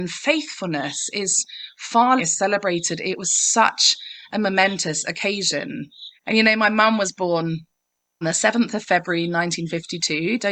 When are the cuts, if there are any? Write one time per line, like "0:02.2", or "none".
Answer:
0:02.2
0:06.2
0:08.2